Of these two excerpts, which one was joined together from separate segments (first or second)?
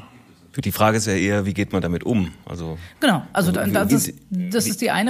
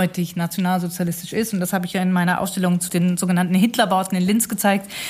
first